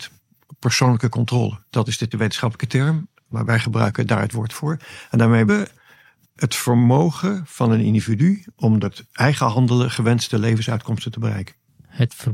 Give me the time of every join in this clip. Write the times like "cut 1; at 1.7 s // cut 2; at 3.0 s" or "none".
cut 1; at 2.1 s // cut 2; at 4.5 s // cut 3; at 5.5 s // cut 4; at 8.8 s